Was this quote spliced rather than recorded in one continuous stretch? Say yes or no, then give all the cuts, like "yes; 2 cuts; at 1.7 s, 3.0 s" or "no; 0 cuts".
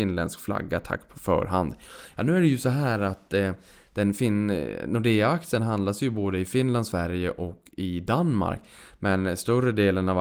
no; 0 cuts